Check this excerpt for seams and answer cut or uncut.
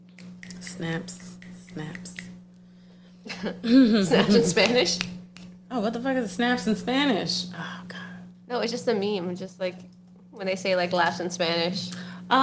cut